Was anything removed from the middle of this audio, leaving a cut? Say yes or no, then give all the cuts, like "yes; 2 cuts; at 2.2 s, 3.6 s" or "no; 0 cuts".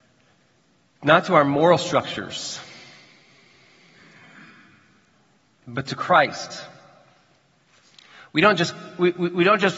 no; 0 cuts